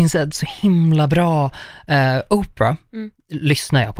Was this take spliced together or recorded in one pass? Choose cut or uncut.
uncut